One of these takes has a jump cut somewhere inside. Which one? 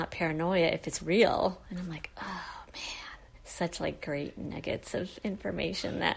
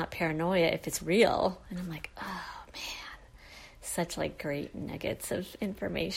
first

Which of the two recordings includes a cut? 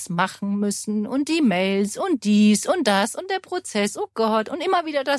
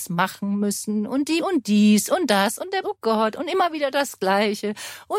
second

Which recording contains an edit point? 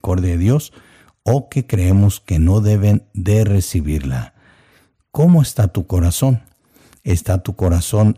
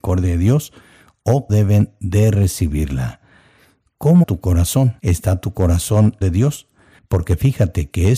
second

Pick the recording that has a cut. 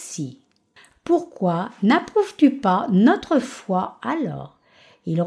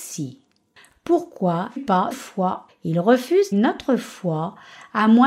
second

